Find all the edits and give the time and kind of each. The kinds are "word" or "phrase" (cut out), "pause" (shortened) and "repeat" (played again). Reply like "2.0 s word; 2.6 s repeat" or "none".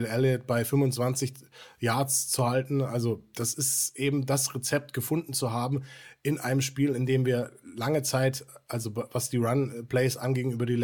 none